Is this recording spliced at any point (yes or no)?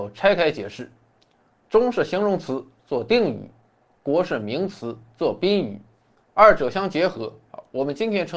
no